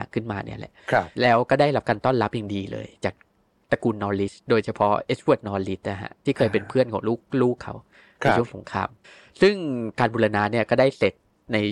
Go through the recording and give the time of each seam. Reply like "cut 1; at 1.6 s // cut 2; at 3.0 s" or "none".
cut 1; at 1.2 s // cut 2; at 9.0 s